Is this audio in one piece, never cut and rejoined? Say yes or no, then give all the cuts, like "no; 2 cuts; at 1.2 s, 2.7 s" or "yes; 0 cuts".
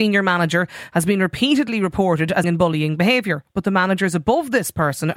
no; 1 cut; at 2.4 s